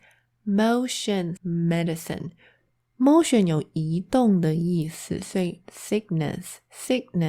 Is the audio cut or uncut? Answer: cut